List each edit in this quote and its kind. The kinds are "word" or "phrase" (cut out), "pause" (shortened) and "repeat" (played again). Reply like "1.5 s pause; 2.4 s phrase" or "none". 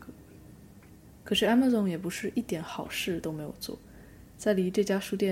none

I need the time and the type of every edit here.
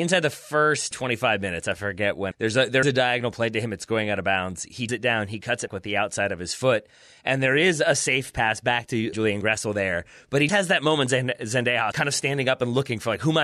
0.9 s word; 2.3 s word; 2.8 s word; 4.9 s word; 5.7 s word; 9.1 s word; 10.5 s word; 11.9 s word

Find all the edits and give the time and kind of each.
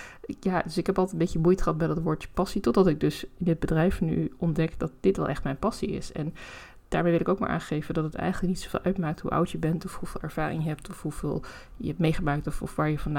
none

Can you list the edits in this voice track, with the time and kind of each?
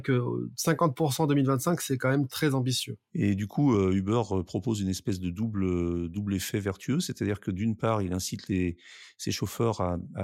none

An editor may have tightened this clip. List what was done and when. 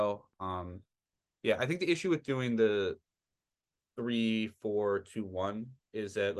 none

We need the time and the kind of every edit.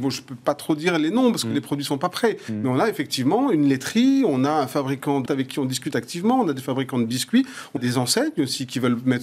5.3 s word; 7.8 s word

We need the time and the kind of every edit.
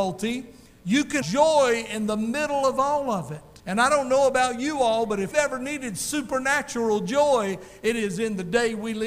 1.2 s word; 3.6 s pause; 5.3 s word

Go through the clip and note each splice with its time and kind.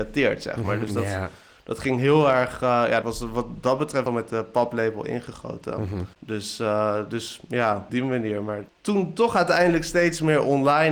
3.0 s phrase; 4.1 s phrase; 6.1 s pause; 7.9 s word; 8.7 s pause

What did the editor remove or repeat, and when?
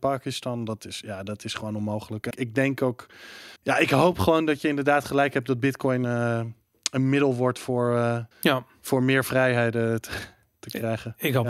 2.3 s word; 3.6 s pause; 6.0 s word; 8.3 s pause

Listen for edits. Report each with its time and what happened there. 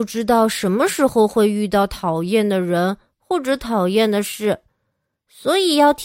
none

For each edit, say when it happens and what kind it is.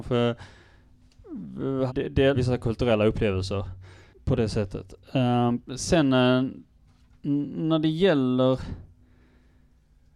1.9 s word; 2.3 s word; 5.6 s pause

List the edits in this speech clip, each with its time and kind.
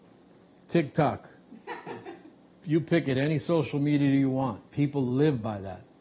2.3 s pause; 4.7 s pause

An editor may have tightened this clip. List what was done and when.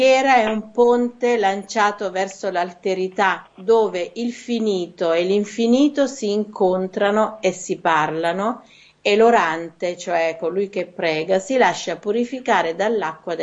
none

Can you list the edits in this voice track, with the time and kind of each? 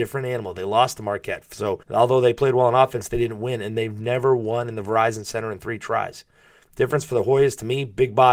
1.8 s pause

